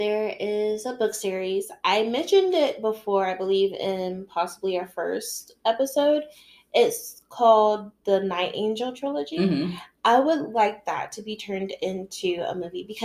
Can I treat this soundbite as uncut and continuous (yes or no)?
yes